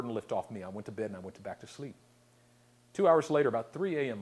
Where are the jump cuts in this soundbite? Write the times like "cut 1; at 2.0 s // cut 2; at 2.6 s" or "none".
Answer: none